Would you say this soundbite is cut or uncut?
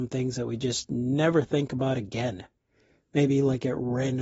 uncut